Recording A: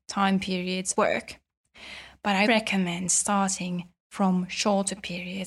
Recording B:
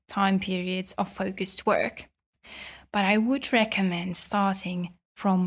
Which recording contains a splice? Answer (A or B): A